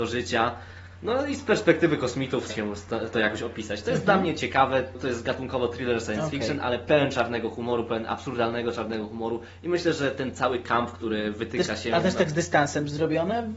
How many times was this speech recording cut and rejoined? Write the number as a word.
two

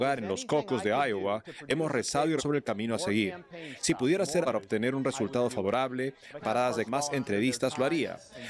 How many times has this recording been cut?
four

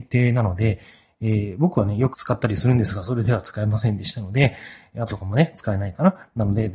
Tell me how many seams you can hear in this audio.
two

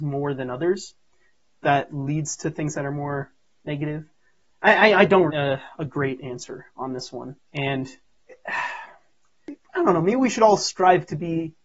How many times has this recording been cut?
one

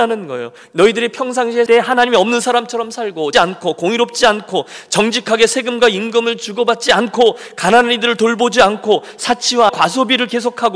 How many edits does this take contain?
three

